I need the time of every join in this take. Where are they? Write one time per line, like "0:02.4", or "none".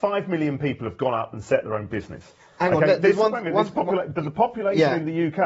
none